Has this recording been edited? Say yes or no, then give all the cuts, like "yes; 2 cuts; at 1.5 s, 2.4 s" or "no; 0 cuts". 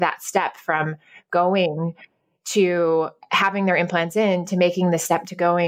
no; 0 cuts